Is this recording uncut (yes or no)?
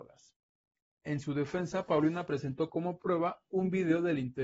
yes